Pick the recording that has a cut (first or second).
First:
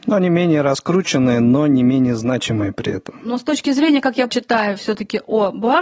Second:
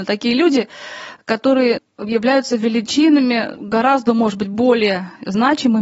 first